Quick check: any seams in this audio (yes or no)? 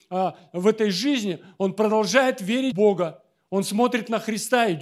yes